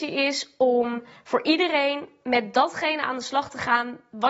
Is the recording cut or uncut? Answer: uncut